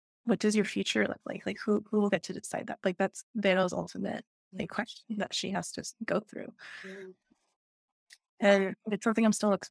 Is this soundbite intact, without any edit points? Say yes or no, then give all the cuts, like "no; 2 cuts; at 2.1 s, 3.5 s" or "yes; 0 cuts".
yes; 0 cuts